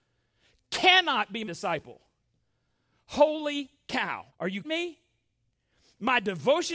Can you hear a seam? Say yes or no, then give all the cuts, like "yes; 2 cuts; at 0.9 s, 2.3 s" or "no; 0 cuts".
yes; 3 cuts; at 1.5 s, 4.3 s, 4.6 s